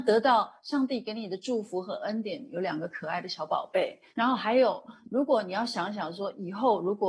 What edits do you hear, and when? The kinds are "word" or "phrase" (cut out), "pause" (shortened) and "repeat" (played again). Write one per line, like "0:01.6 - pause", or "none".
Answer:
0:04.1 - pause